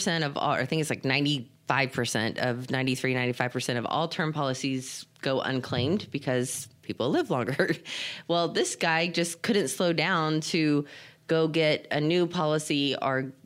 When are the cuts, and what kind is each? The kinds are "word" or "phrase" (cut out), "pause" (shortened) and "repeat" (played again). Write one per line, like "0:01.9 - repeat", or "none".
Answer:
none